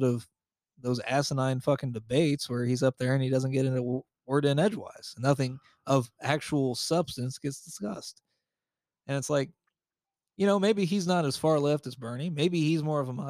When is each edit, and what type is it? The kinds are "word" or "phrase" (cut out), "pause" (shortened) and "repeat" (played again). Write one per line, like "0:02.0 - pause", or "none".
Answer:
none